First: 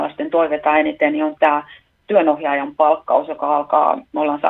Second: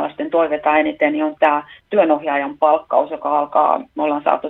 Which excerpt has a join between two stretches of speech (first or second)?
second